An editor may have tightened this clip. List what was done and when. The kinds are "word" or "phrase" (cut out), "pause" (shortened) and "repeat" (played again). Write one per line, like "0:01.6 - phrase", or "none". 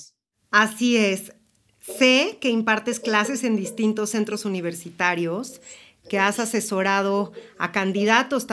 none

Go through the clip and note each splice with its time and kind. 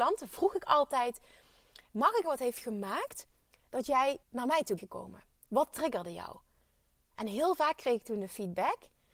0:02.2 - word
0:04.2 - pause
0:04.8 - word

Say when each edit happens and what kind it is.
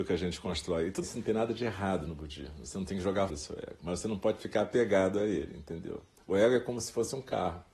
0:01.0 - word
0:03.3 - word

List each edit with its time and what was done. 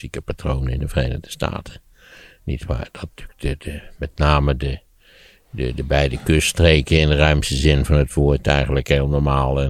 none

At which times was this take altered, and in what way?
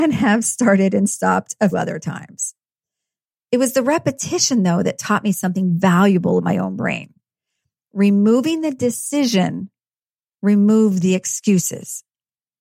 0:01.7 - word
0:06.4 - word

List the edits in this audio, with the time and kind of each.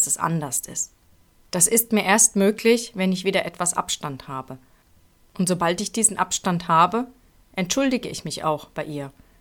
none

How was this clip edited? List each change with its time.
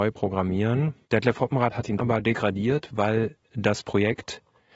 0:01.0 - pause
0:02.0 - word

